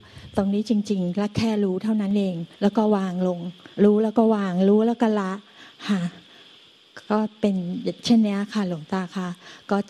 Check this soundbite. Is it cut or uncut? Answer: cut